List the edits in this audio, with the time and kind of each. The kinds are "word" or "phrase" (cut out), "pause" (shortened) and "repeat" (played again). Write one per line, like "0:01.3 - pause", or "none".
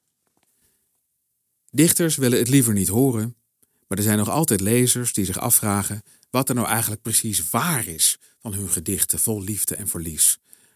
none